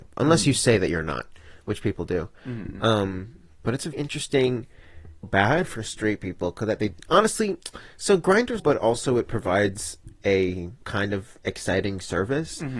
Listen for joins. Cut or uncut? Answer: cut